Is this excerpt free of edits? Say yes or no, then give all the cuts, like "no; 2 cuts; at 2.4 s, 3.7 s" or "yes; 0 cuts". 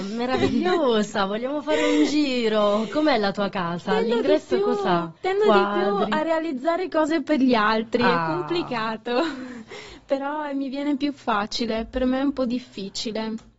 no; 1 cut; at 5.2 s